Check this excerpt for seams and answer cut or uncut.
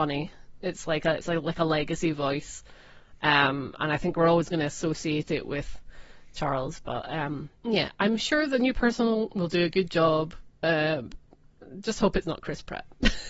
cut